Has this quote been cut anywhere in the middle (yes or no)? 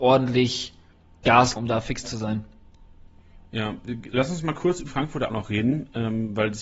yes